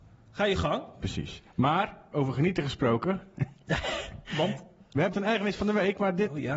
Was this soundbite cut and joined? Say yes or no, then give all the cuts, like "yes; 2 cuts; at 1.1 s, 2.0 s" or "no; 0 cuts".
yes; 1 cut; at 5.1 s